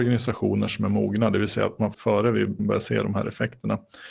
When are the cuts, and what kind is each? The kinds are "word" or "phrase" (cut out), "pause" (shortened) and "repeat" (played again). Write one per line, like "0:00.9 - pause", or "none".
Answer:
0:01.9 - word
0:02.6 - word